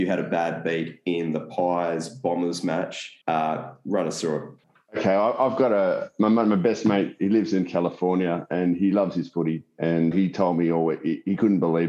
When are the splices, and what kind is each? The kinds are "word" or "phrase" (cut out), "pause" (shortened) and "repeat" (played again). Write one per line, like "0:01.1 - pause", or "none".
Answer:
0:03.2 - pause
0:04.6 - pause
0:10.1 - word